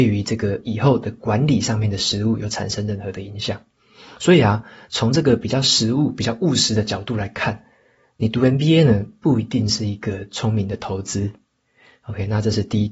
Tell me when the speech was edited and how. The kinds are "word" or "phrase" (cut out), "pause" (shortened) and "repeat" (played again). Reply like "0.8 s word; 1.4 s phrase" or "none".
none